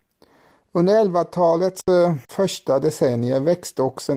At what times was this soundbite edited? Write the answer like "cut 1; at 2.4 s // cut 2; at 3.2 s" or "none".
cut 1; at 2.2 s